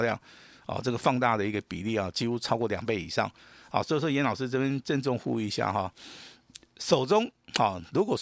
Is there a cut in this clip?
no; 0 cuts

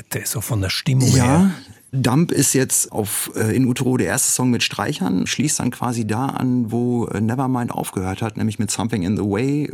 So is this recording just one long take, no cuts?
no; 2 cuts; at 2.9 s, 5.3 s

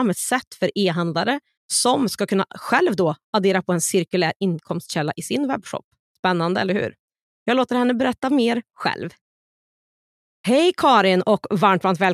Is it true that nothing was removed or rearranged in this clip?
yes; 0 cuts

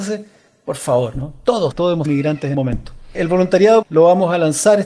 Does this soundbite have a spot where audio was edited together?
yes; 4 cuts; at 1.7 s, 2.1 s, 2.5 s, 3.8 s

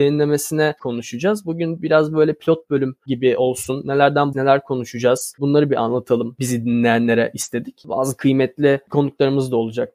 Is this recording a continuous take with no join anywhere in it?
no; 1 cut; at 4.3 s

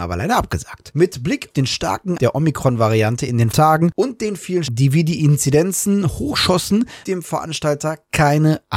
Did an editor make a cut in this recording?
yes; 5 cuts; at 1.5 s, 2.2 s, 3.5 s, 4.7 s, 7.0 s

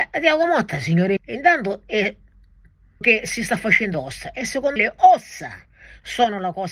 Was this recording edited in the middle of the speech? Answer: yes; 4 cuts; at 1.2 s, 3.0 s, 3.9 s, 4.8 s

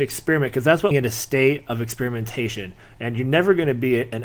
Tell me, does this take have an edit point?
yes; 1 cut; at 0.9 s

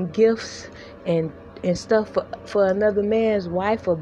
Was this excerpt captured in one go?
yes; 0 cuts

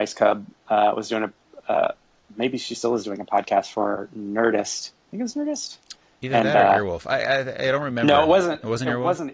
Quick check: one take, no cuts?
yes; 0 cuts

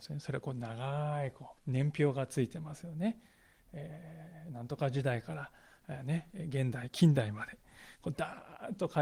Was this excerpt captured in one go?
no; 1 cut; at 1.6 s

